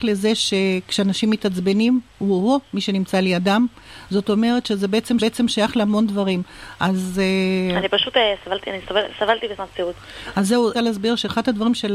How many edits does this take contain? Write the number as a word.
three